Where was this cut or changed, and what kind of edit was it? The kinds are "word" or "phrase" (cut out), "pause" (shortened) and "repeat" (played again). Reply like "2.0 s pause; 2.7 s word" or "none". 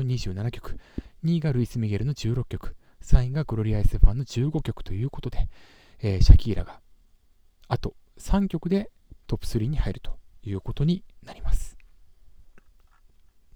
none

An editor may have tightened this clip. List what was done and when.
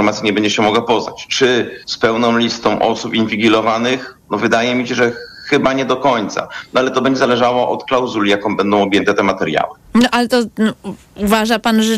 1.8 s pause; 9.8 s pause

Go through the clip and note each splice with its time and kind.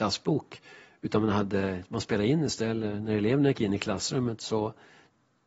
none

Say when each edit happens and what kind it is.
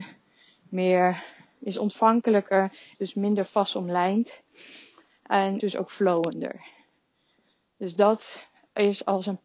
2.9 s phrase; 5.6 s word

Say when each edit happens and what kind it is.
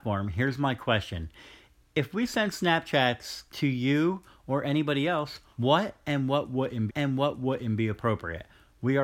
5.5 s pause; 6.9 s repeat

